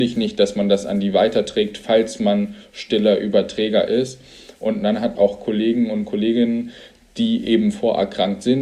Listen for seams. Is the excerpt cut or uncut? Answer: cut